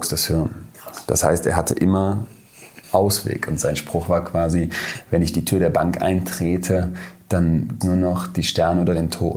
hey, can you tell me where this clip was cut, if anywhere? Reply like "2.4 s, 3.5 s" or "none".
2.8 s, 7.8 s